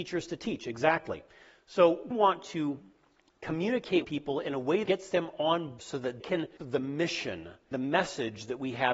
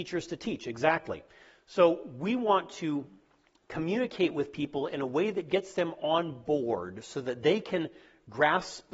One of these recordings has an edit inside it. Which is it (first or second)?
first